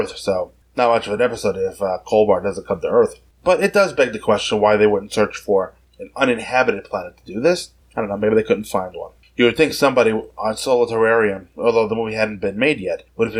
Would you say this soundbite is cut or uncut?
uncut